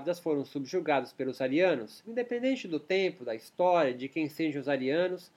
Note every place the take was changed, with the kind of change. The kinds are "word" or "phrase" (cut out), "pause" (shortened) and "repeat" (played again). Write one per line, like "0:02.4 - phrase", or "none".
none